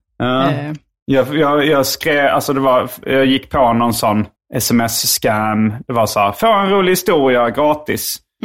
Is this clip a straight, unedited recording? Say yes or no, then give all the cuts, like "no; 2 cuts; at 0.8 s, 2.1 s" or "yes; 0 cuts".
no; 1 cut; at 4.4 s